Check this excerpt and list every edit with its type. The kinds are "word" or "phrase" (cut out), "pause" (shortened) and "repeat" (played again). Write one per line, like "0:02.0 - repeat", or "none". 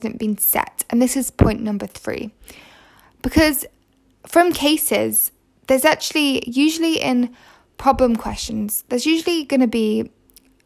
none